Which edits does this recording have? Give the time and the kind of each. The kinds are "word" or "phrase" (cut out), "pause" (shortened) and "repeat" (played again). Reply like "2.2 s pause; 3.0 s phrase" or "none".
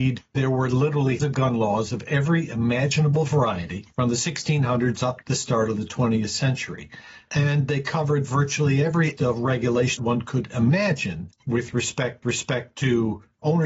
1.2 s word; 3.9 s pause; 5.2 s word; 9.2 s word; 10.0 s word; 12.2 s repeat